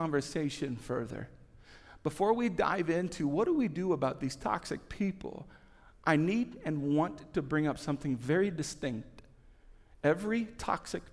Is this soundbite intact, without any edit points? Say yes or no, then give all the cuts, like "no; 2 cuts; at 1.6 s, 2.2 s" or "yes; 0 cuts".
yes; 0 cuts